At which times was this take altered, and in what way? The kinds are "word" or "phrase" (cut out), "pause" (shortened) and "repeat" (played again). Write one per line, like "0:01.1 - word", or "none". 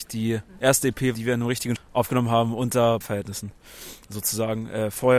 0:01.1 - word
0:01.8 - word
0:03.0 - word